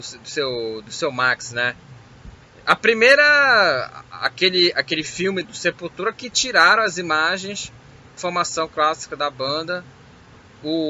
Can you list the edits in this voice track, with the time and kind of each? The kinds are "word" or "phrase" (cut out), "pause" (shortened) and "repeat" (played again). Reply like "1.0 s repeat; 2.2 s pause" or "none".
2.5 s pause; 5.4 s word; 8.2 s word